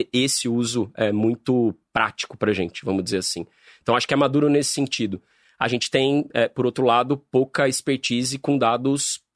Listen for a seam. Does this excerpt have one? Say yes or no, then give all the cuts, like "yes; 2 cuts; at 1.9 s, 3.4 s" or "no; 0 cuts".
no; 0 cuts